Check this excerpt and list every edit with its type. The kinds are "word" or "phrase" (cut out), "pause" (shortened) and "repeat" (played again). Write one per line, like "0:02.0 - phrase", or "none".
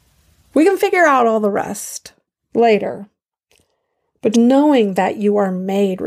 0:02.2 - pause
0:04.3 - word